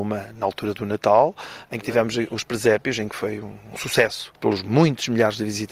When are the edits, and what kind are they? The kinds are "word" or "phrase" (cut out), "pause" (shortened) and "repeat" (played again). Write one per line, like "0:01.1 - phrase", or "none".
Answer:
none